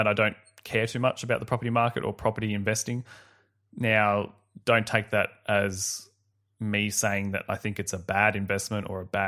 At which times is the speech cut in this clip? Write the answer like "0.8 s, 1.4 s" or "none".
none